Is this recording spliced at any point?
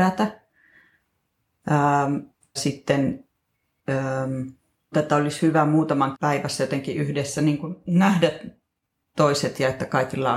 yes; 4 cuts; at 2.6 s, 4.9 s, 6.1 s, 7.8 s

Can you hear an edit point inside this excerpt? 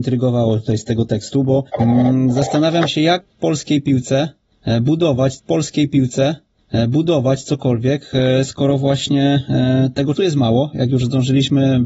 yes; 3 cuts; at 1.7 s, 5.4 s, 10.2 s

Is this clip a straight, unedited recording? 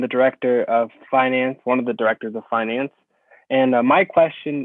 yes; 0 cuts

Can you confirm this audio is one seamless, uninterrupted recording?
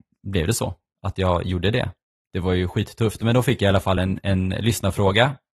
yes; 0 cuts

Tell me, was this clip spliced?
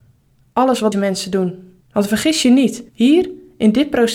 yes; 3 cuts; at 0.9 s, 1.8 s, 2.9 s

